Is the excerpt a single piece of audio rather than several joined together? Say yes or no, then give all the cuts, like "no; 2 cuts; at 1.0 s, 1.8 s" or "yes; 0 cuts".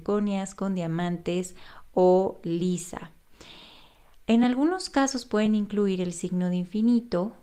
yes; 0 cuts